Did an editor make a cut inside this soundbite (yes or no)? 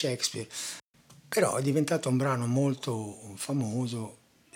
no